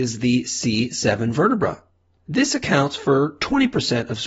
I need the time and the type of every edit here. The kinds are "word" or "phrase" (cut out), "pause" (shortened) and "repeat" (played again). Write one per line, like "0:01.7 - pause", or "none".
none